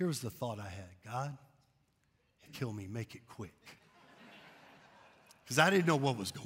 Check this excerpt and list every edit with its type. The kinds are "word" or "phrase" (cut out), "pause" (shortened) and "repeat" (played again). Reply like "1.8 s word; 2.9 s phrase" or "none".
2.5 s phrase